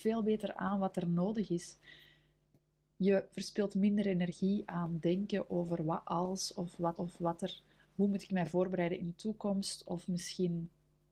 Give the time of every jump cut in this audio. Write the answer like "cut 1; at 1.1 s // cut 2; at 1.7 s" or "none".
cut 1; at 7.0 s